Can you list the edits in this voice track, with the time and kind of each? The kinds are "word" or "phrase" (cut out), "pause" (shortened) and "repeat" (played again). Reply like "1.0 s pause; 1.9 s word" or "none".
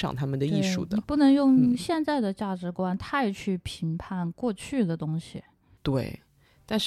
none